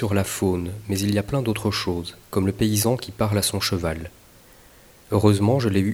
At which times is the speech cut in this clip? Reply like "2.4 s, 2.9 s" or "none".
2.2 s